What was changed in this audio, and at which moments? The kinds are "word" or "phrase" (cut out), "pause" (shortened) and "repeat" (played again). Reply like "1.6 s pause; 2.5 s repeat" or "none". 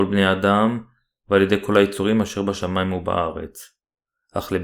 none